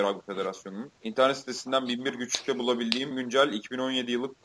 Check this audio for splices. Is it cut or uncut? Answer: cut